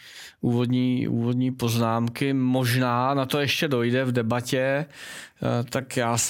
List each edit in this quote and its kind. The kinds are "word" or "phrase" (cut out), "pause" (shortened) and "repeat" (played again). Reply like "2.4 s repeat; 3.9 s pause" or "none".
none